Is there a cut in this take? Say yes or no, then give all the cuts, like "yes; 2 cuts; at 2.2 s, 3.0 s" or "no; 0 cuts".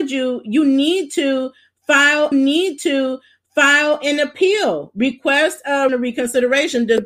yes; 2 cuts; at 2.3 s, 5.9 s